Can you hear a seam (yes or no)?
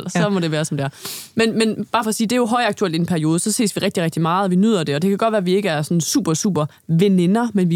no